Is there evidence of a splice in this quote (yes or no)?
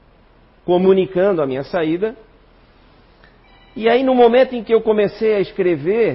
no